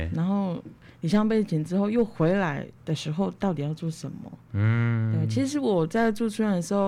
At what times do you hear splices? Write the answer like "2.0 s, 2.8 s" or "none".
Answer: 2.8 s

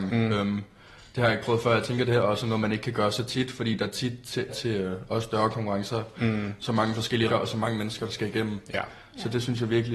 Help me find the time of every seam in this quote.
4.5 s, 7.3 s

